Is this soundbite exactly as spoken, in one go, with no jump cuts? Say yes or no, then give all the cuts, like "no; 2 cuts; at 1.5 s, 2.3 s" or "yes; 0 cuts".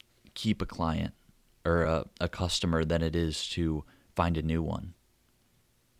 yes; 0 cuts